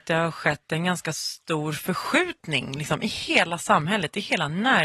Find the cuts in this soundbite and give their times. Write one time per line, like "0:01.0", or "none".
none